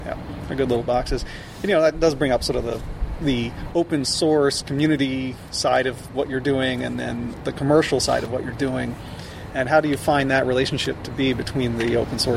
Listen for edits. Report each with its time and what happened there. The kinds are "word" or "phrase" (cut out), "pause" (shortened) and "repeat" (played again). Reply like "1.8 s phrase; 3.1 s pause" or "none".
none